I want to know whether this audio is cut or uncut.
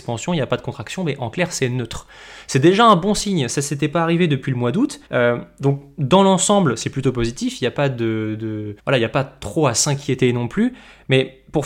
cut